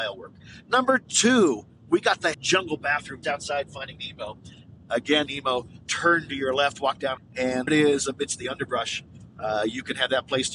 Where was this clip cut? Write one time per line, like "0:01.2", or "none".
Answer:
0:02.3
0:03.2
0:05.3
0:05.8
0:07.2
0:07.7